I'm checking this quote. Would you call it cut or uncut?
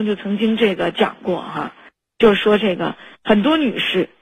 uncut